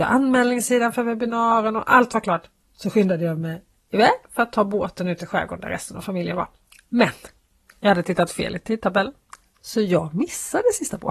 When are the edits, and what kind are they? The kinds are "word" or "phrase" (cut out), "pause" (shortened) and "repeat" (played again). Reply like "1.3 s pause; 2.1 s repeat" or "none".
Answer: none